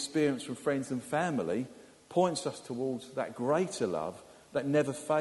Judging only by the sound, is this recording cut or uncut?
uncut